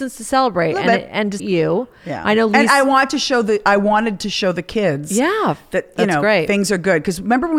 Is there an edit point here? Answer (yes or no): yes